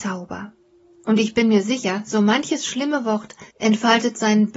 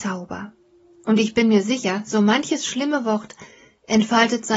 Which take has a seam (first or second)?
first